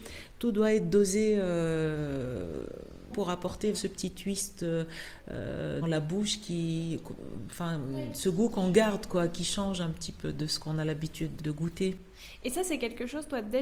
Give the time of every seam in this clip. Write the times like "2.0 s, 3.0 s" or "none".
3.1 s, 3.7 s, 5.8 s, 11.4 s